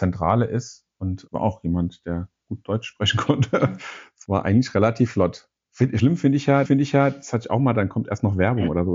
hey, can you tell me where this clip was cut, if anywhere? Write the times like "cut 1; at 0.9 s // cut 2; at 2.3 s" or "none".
cut 1; at 1.3 s // cut 2; at 4.2 s // cut 3; at 6.6 s

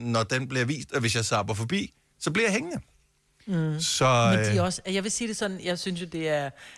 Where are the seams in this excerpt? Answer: none

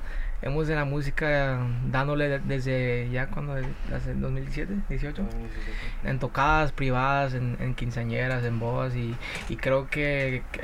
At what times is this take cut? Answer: cut 1; at 6.0 s

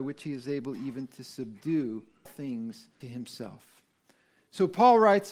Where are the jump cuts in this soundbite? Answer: cut 1; at 2.3 s // cut 2; at 3.0 s

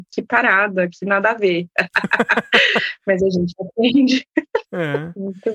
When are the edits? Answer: none

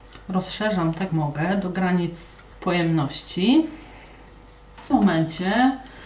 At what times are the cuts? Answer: cut 1; at 1.1 s // cut 2; at 2.5 s // cut 3; at 4.9 s

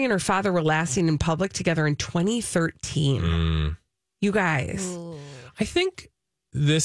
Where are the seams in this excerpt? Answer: none

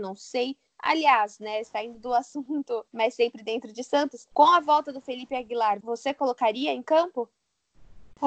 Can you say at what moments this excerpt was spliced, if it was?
cut 1; at 2.9 s // cut 2; at 4.3 s // cut 3; at 5.8 s

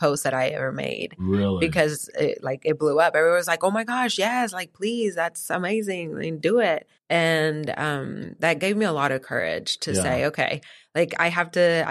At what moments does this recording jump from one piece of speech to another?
cut 1; at 7.0 s

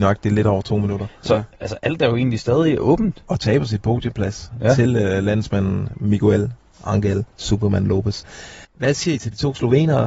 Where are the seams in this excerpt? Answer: cut 1; at 7.3 s // cut 2; at 8.6 s

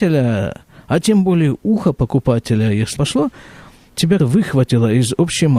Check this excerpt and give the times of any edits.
cut 1; at 3.0 s // cut 2; at 4.2 s

